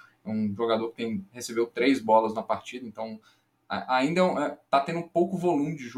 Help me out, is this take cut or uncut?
uncut